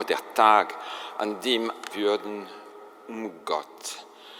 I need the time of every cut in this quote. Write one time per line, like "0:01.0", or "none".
0:01.9